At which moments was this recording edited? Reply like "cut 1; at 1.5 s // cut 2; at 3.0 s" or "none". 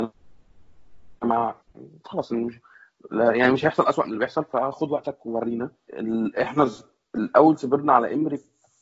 none

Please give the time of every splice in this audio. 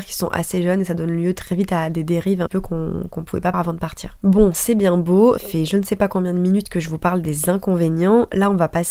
cut 1; at 2.5 s // cut 2; at 3.5 s // cut 3; at 5.4 s

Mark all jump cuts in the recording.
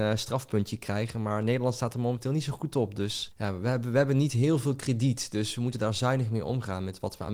none

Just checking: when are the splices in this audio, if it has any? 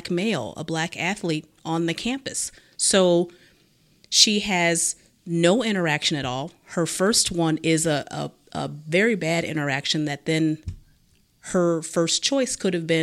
none

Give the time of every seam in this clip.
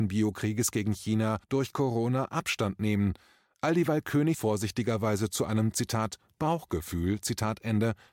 cut 1; at 1.4 s // cut 2; at 4.3 s

